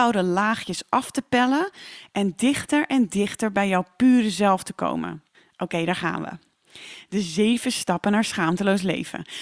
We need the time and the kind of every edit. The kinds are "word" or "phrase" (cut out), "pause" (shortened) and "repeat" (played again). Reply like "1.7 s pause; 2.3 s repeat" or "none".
5.3 s pause

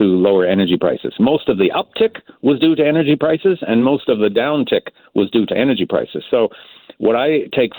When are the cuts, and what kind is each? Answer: none

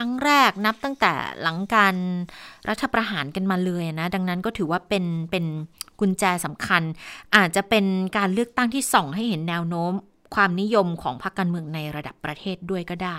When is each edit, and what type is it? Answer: none

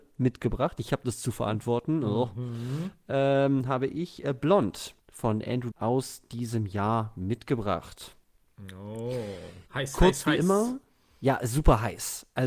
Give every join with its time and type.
5.0 s pause; 5.7 s word; 9.7 s pause

